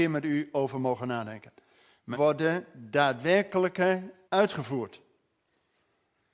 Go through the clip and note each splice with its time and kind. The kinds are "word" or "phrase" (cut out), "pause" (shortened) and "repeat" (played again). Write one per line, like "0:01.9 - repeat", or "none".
0:02.1 - word
0:04.2 - word